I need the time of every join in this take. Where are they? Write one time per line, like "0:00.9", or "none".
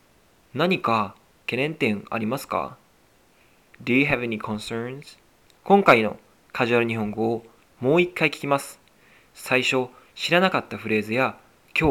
0:05.5